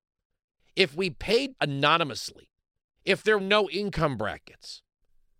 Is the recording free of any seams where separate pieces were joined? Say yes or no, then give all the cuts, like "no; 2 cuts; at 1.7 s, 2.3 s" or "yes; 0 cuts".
no; 3 cuts; at 1.6 s, 2.7 s, 3.4 s